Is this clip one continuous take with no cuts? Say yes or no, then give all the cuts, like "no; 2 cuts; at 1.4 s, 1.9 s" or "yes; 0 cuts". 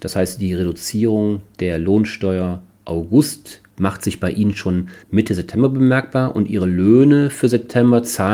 no; 2 cuts; at 3.7 s, 5.0 s